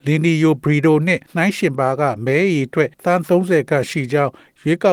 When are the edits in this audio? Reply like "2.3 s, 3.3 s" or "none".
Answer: 1.3 s, 2.9 s